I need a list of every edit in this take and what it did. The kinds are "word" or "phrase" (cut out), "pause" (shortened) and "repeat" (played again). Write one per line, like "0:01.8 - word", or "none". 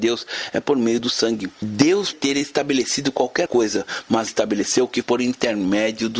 0:02.1 - word
0:03.5 - word
0:04.3 - word
0:05.0 - word